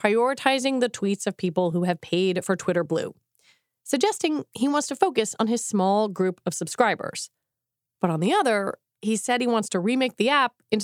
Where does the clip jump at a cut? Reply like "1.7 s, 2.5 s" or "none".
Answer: none

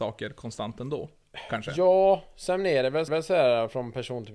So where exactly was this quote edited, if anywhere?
3.1 s

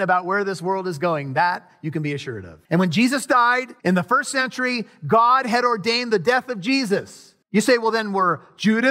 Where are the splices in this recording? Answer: 2.6 s, 3.8 s, 7.4 s

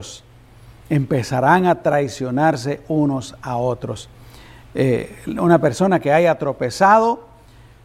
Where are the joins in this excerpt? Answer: none

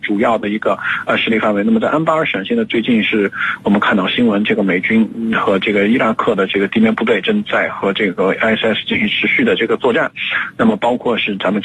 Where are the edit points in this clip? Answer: none

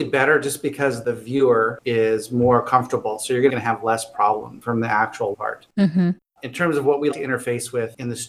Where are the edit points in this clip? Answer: 3.5 s, 5.3 s, 7.1 s

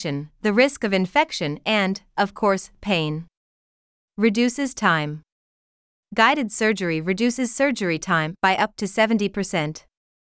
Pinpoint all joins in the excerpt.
none

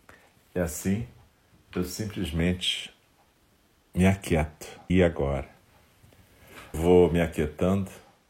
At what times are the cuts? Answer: 4.9 s, 6.7 s

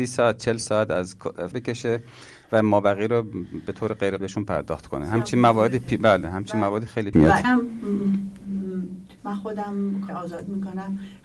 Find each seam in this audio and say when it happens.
1.5 s, 4.2 s, 7.1 s, 7.4 s, 9.2 s, 10.1 s

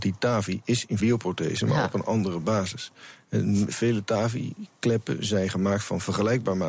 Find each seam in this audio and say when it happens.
1.0 s

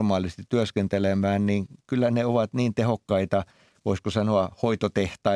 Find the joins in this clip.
none

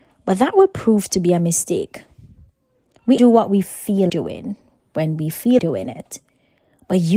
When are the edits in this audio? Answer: 3.2 s, 4.1 s, 5.6 s

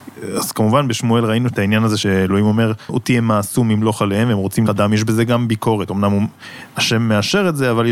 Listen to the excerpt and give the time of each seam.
2.9 s, 4.7 s

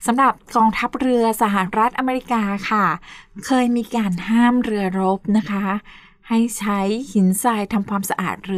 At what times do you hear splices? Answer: none

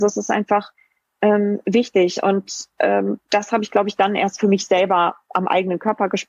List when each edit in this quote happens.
2.7 s

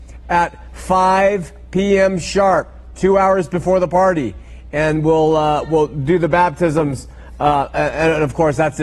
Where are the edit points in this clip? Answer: none

